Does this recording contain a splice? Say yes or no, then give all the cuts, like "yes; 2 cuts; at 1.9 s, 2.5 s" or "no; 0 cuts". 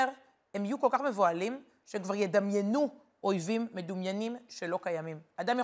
no; 0 cuts